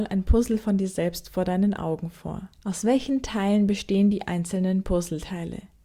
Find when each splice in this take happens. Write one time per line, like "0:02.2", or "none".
0:02.5